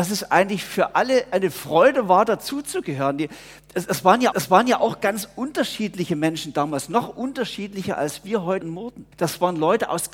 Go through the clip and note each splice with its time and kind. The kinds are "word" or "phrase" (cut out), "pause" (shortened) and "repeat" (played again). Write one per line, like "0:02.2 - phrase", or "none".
0:04.3 - repeat
0:08.6 - word
0:09.1 - pause